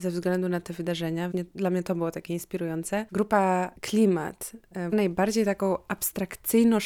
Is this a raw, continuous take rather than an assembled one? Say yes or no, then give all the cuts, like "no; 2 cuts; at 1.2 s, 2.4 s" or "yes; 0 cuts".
no; 2 cuts; at 1.3 s, 4.9 s